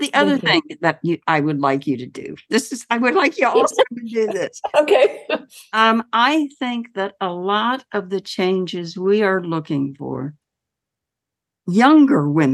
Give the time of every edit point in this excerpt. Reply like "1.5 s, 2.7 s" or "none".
none